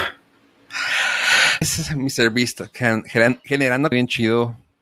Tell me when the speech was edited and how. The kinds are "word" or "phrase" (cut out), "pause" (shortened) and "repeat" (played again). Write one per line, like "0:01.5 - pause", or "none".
0:01.6 - word
0:03.9 - word

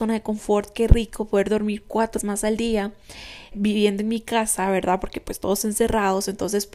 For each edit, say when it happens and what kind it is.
0:02.2 - word
0:03.5 - word

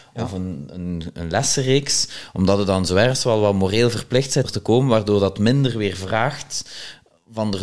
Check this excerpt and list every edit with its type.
0:04.4 - word

